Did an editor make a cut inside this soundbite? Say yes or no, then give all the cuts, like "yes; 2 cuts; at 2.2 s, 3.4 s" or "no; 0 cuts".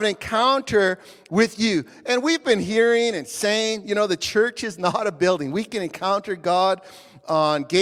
no; 0 cuts